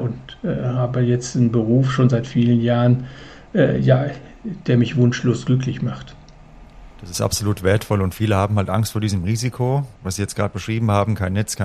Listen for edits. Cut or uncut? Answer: cut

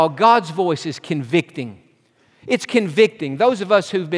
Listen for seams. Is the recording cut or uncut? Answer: uncut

